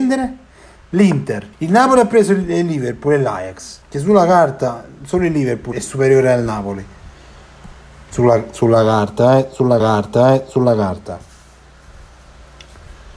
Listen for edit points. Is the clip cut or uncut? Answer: cut